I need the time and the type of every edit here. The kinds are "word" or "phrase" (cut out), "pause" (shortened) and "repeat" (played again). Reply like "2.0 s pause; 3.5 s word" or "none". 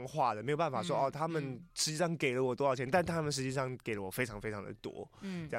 1.7 s pause